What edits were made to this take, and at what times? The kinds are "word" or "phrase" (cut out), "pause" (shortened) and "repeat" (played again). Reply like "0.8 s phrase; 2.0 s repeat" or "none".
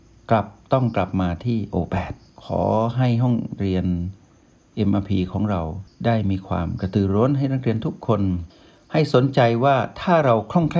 none